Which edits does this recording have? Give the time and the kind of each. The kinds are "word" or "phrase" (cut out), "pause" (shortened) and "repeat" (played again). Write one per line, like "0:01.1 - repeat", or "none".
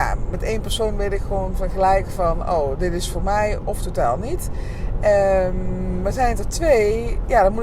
none